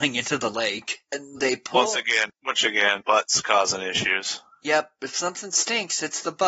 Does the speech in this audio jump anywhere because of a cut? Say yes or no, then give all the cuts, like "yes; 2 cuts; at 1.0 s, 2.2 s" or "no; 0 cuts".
yes; 2 cuts; at 1.4 s, 3.0 s